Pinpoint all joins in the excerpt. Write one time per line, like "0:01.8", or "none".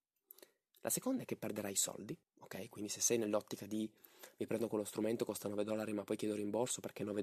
0:02.2

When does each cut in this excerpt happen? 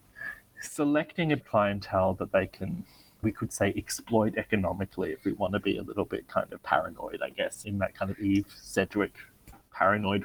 0:01.4
0:03.2
0:07.6

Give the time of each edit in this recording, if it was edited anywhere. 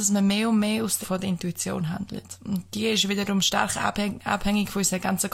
0:01.0

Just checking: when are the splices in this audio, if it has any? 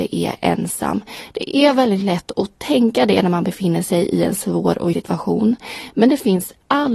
0:04.9

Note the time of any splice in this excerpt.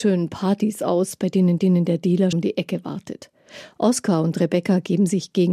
0:01.6
0:02.3

